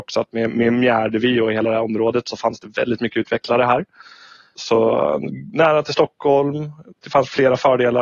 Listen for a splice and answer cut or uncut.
uncut